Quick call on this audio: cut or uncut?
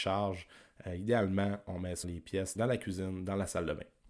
cut